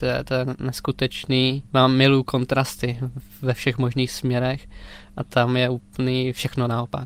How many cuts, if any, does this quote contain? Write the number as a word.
one